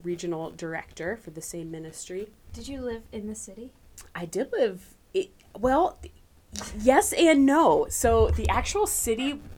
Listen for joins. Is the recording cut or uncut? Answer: cut